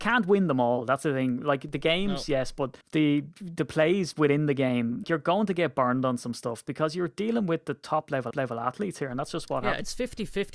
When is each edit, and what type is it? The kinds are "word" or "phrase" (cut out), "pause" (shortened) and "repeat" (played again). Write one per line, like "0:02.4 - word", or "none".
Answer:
0:02.8 - pause
0:05.0 - word
0:08.3 - repeat